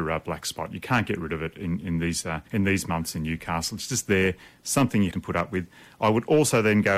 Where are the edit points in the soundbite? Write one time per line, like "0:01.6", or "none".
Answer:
0:02.5
0:05.1